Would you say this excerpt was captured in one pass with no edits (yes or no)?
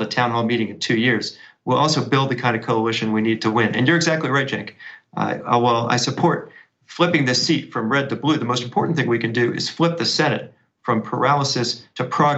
yes